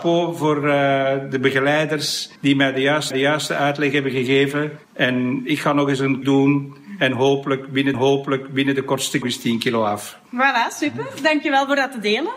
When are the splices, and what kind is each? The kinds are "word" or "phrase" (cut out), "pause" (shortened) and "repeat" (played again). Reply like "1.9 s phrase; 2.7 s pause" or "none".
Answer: 2.4 s pause; 3.1 s repeat; 4.8 s pause; 6.2 s word; 7.9 s repeat; 9.2 s phrase